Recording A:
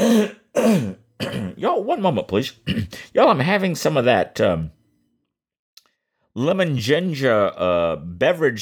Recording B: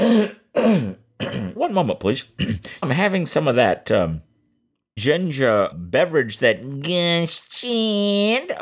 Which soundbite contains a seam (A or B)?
B